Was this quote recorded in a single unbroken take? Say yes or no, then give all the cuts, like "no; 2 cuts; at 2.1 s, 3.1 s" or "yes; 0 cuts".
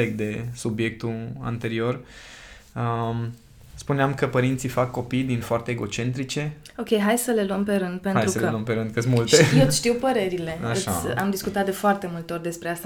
no; 1 cut; at 5.4 s